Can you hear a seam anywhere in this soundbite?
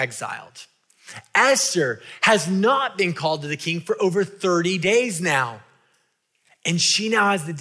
no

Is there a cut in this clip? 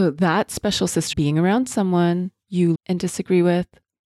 yes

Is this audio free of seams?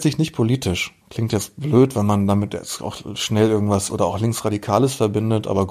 no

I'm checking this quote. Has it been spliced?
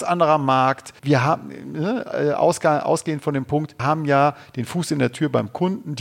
yes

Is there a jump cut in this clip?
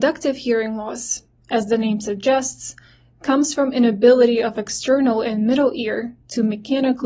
no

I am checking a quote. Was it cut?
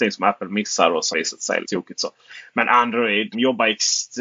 yes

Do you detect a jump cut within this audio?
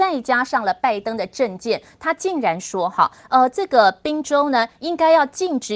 no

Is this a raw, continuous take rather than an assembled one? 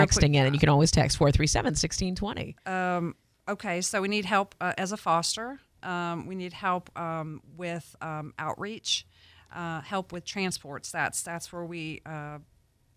yes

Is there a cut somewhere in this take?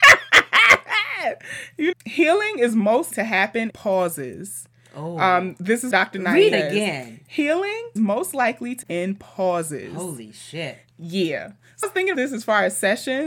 yes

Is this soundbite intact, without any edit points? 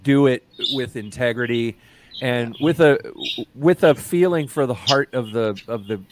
yes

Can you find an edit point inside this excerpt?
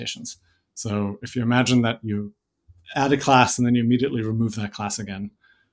no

